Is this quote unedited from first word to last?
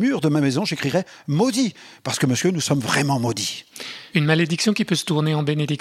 yes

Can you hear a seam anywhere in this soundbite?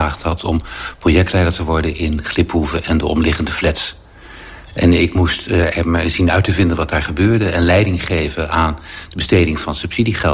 no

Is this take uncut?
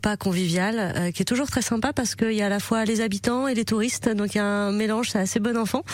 yes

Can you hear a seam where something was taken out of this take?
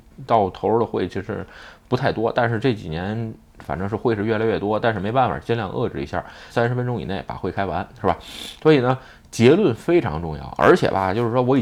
yes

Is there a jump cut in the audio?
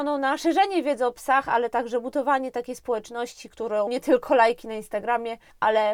yes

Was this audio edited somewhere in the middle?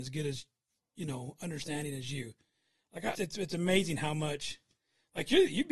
yes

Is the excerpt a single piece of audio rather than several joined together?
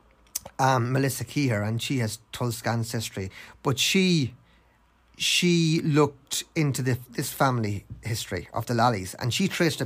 yes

